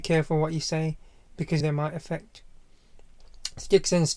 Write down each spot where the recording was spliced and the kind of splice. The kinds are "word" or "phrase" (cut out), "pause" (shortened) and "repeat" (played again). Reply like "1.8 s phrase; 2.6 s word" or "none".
1.6 s phrase